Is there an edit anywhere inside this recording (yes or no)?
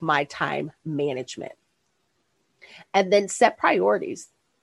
no